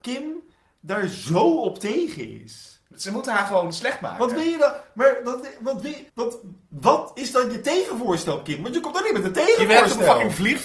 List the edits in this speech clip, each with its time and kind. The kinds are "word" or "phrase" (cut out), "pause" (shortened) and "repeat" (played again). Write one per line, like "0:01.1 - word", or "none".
0:06.1 - pause